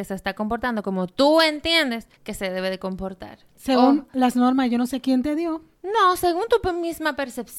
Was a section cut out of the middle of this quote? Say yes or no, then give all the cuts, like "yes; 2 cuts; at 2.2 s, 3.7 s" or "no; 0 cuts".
yes; 1 cut; at 2.1 s